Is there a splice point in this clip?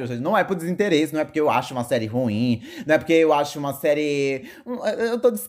no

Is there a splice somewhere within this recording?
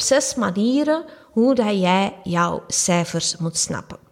no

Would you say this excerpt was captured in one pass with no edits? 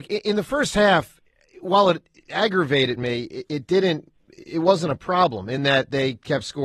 yes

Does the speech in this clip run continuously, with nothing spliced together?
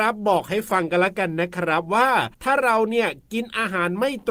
no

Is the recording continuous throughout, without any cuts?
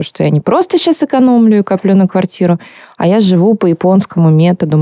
yes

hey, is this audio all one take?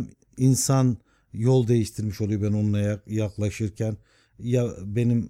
yes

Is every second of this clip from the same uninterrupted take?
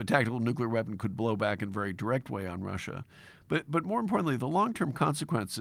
yes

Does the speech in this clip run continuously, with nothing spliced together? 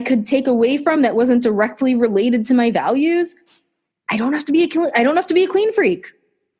yes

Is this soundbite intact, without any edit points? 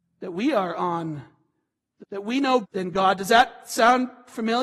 no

